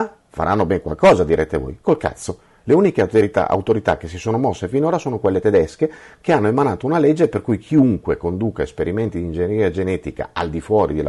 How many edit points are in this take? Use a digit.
0